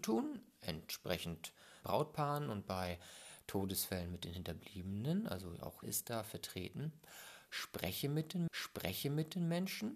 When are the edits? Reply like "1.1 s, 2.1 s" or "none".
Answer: 1.8 s, 5.8 s, 8.5 s